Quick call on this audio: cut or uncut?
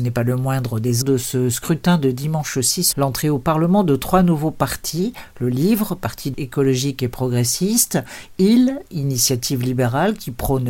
cut